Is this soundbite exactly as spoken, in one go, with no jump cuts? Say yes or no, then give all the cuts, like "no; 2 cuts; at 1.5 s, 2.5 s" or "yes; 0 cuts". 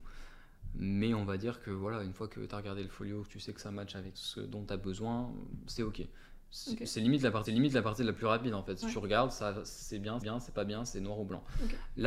no; 4 cuts; at 4.1 s, 7.4 s, 8.8 s, 10.2 s